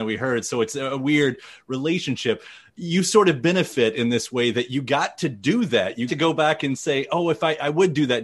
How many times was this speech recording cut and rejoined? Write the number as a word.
one